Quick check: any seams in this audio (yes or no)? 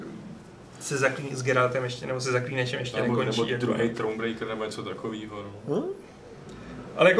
no